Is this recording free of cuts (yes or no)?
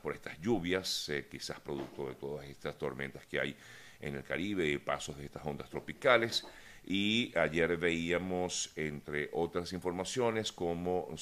yes